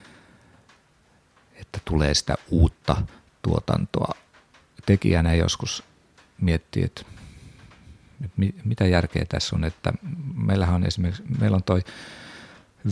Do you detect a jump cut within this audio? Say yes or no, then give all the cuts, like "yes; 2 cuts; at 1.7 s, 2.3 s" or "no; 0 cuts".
no; 0 cuts